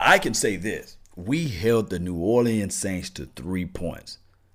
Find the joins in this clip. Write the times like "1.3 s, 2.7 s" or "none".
1.0 s